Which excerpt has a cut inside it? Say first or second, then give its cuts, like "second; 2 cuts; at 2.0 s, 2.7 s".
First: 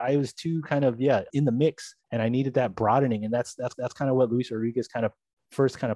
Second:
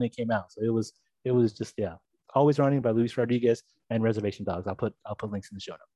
first; 2 cuts; at 2.0 s, 3.7 s